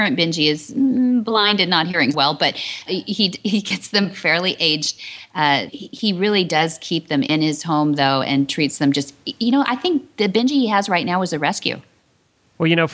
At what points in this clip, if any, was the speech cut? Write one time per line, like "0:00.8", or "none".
0:02.1
0:02.9
0:05.7